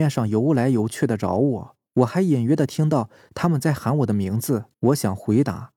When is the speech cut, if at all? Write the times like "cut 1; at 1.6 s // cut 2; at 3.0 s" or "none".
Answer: cut 1; at 1.9 s // cut 2; at 4.7 s